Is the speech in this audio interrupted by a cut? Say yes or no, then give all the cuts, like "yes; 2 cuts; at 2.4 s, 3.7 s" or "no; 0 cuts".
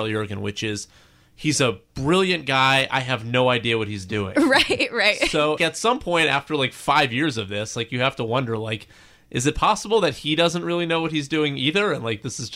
yes; 1 cut; at 5.6 s